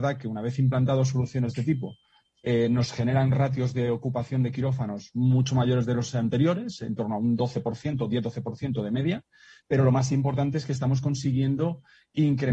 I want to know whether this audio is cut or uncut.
uncut